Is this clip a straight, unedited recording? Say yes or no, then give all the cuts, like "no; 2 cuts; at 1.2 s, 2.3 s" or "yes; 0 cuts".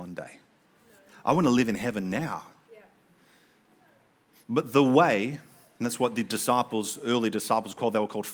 yes; 0 cuts